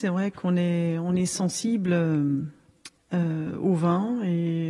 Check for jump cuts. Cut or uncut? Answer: cut